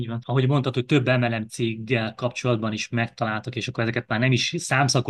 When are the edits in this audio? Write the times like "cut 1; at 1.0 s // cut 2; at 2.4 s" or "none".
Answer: none

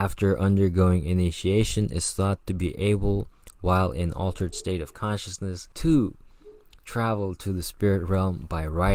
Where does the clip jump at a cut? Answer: cut 1; at 5.7 s

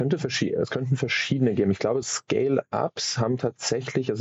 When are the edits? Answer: cut 1; at 2.0 s

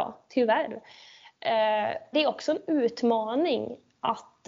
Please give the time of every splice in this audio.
cut 1; at 2.1 s

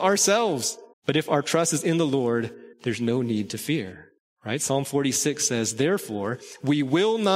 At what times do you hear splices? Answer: cut 1; at 0.9 s // cut 2; at 2.7 s // cut 3; at 4.2 s

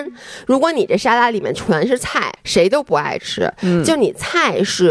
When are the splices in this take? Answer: cut 1; at 2.4 s

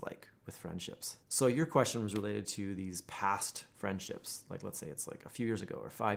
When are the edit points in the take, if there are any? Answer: cut 1; at 1.2 s // cut 2; at 3.7 s

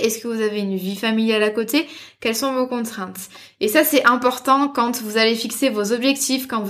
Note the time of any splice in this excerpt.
none

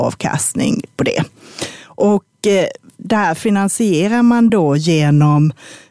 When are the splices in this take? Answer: none

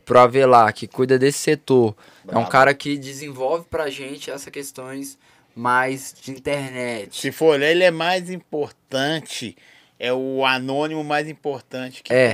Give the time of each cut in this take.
none

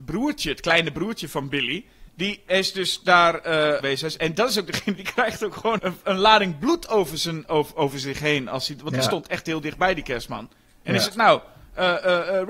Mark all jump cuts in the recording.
cut 1; at 2.1 s // cut 2; at 3.8 s // cut 3; at 5.8 s

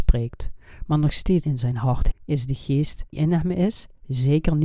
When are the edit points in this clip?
cut 1; at 1.4 s // cut 2; at 2.1 s // cut 3; at 3.1 s

